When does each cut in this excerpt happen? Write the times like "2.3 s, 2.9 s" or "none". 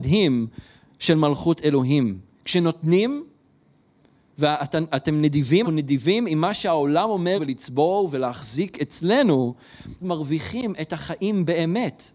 5.6 s, 7.4 s, 10.0 s